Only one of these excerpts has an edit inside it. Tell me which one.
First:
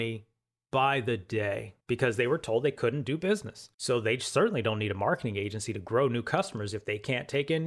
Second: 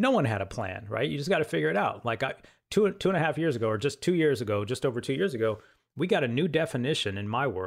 first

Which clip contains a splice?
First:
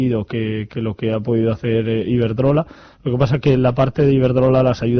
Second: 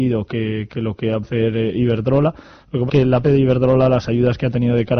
second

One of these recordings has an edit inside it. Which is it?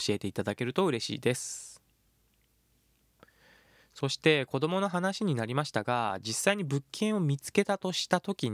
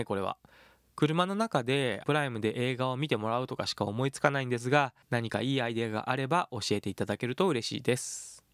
second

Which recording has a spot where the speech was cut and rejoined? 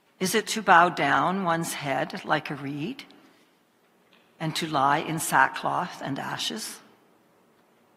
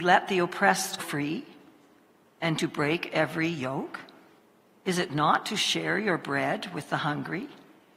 second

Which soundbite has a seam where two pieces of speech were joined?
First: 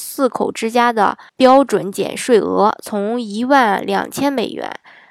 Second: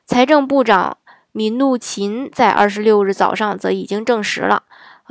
first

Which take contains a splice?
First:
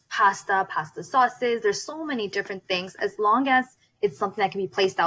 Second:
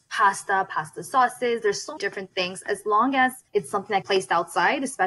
second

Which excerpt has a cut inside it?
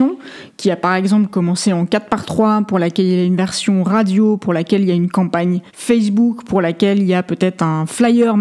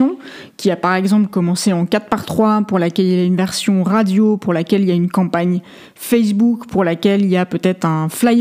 first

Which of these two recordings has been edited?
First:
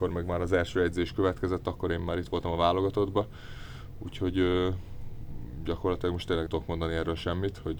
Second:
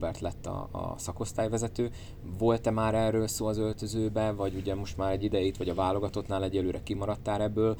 first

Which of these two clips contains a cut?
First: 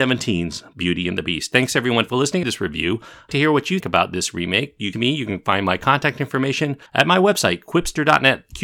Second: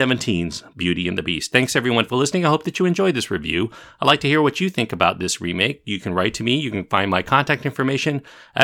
first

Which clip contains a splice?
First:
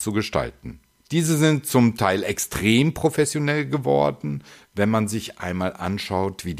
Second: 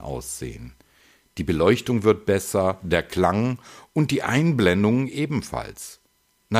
first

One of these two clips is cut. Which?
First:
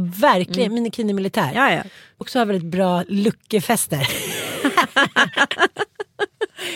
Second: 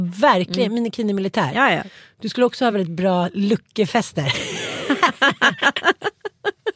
first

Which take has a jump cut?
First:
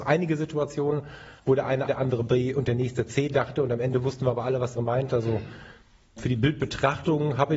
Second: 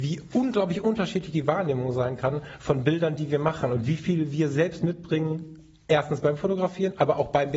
first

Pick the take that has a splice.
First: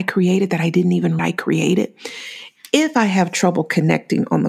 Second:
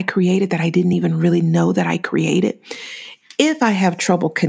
first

